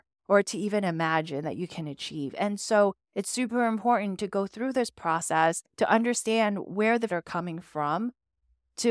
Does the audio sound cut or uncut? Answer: cut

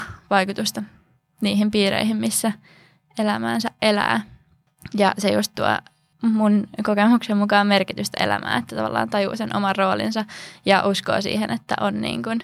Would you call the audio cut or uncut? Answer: uncut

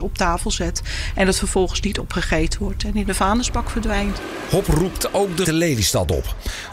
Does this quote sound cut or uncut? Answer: cut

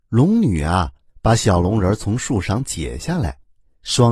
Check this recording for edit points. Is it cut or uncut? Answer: uncut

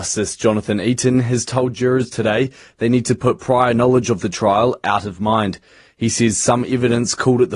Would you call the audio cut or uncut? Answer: uncut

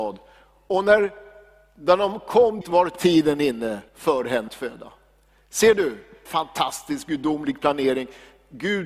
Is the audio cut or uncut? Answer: cut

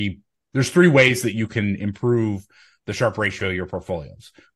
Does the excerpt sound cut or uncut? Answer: uncut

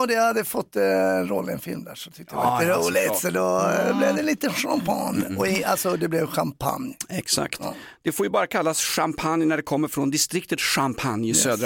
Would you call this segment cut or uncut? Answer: uncut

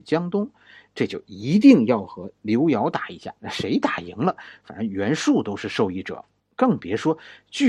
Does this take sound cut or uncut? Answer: cut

